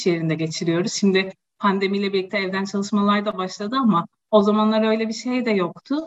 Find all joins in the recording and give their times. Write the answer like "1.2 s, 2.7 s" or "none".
none